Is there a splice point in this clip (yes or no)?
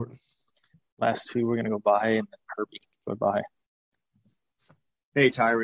no